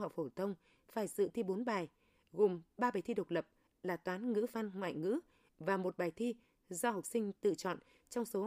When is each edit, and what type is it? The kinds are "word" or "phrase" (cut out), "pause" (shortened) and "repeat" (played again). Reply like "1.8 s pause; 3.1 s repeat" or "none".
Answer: none